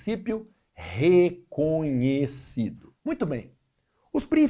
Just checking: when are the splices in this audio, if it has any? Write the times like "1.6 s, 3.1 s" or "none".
3.0 s